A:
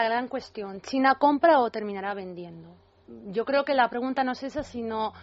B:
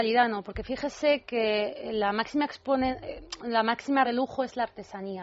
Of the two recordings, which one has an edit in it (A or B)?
B